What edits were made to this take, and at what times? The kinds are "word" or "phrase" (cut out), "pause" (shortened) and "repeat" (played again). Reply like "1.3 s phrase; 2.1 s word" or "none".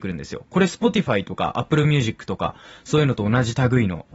none